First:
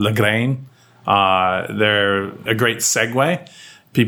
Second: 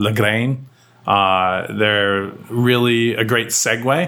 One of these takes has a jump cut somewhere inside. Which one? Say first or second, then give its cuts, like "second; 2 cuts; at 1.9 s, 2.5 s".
first; 1 cut; at 2.5 s